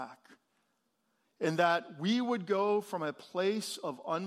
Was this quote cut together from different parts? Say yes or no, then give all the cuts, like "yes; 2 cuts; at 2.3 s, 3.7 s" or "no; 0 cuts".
no; 0 cuts